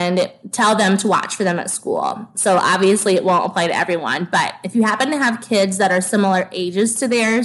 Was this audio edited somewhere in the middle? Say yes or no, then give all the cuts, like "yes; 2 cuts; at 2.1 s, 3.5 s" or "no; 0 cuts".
no; 0 cuts